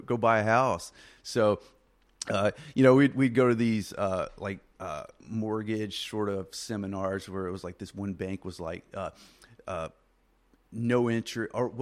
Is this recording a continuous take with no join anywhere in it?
yes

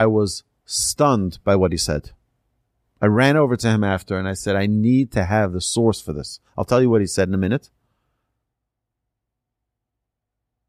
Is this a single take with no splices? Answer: yes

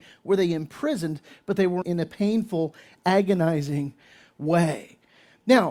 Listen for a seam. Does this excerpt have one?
yes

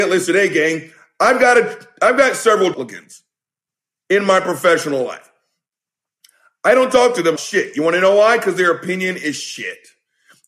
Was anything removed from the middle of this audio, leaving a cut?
yes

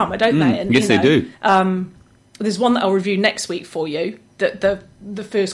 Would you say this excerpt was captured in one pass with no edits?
no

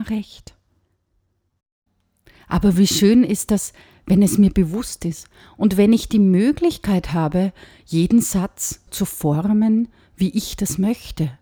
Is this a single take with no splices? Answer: no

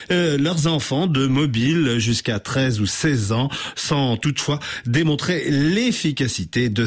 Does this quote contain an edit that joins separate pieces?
no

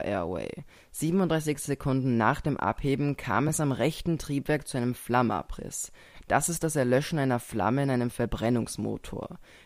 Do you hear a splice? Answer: no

